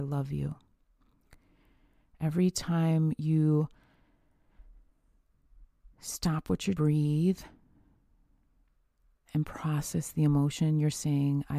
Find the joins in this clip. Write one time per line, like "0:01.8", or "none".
0:05.9
0:06.8